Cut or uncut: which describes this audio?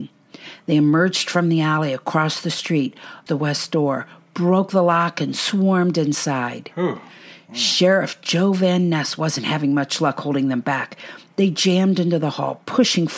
cut